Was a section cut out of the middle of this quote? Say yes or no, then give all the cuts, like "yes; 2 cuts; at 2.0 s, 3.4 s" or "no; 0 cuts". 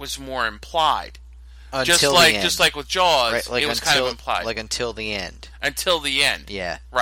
no; 0 cuts